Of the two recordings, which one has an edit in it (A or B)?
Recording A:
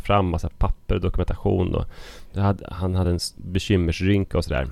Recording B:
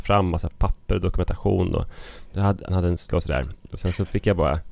B